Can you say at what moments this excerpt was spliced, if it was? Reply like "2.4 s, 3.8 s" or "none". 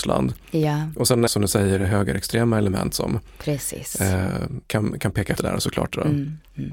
1.3 s, 4.6 s, 5.4 s

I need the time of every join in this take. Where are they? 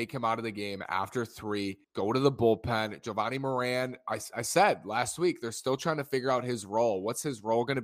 1.8 s

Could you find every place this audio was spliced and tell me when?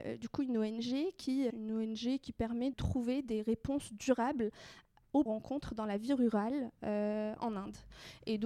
1.5 s, 2.7 s, 5.3 s

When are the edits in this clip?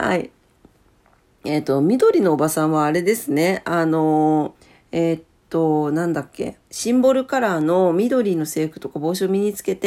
4.6 s, 6.6 s

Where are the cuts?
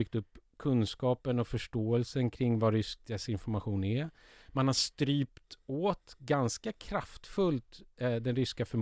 none

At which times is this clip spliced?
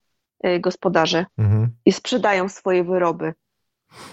1.3 s

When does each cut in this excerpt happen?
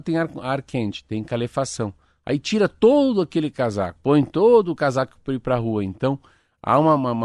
4.0 s

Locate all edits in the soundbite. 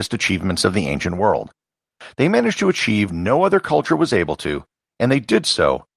3.1 s

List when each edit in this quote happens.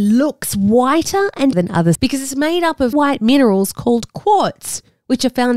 1.5 s, 1.9 s, 2.9 s

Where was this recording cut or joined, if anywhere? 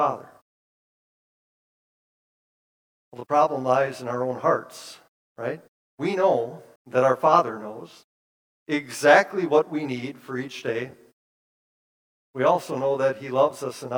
5.8 s, 6.8 s

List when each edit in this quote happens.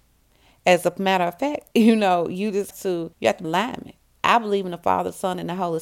1.7 s, 2.7 s, 3.1 s, 3.4 s

